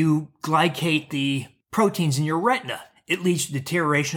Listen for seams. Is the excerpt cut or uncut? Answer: uncut